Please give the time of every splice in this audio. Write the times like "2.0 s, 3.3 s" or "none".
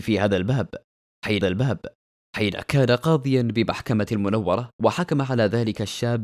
1.4 s, 4.1 s